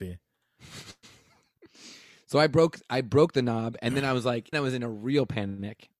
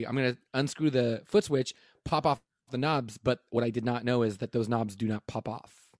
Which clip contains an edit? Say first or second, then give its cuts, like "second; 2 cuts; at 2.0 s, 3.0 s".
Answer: first; 1 cut; at 4.5 s